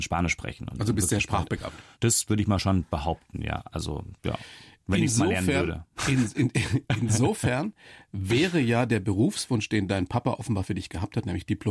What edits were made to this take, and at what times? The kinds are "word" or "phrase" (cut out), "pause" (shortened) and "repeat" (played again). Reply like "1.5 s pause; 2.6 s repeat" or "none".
4.2 s pause